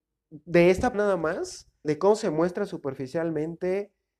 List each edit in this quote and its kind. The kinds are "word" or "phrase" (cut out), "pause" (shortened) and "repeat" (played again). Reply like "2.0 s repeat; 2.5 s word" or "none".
0.9 s word; 1.8 s word